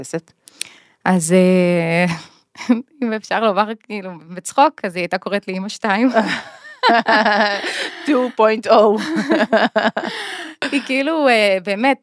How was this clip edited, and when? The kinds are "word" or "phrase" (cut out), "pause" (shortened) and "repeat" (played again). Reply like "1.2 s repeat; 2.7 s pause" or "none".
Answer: none